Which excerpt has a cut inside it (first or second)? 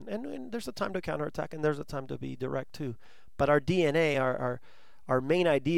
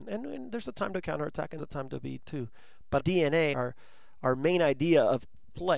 second